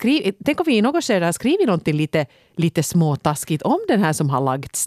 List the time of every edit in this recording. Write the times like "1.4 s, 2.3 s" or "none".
none

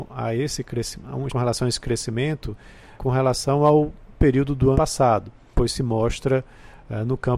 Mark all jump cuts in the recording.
1.3 s, 3.0 s, 4.2 s, 4.7 s, 5.5 s

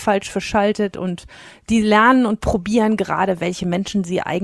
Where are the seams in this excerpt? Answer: none

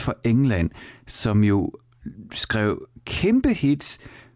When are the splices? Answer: none

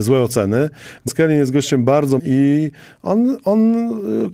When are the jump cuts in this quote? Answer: 1.1 s, 2.2 s

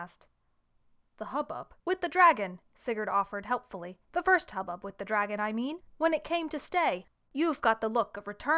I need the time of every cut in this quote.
1.8 s, 4.0 s, 5.9 s, 7.2 s

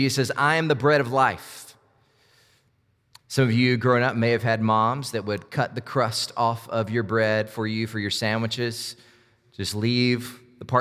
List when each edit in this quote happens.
none

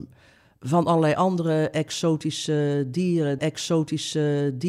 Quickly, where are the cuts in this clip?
3.4 s

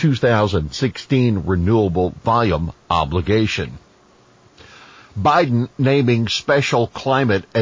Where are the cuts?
none

